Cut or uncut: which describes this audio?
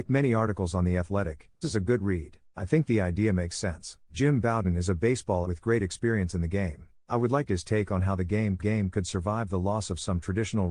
cut